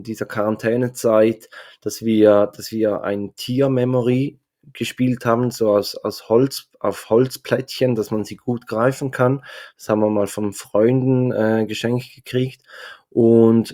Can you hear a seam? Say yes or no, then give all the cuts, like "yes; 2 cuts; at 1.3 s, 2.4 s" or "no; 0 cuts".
no; 0 cuts